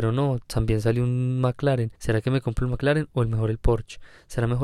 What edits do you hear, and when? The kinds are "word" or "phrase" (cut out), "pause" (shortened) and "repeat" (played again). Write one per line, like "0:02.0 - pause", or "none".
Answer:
0:02.0 - pause